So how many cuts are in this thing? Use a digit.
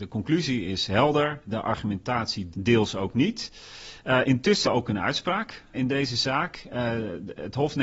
3